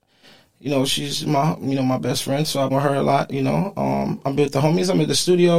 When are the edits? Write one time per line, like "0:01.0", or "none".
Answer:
0:02.7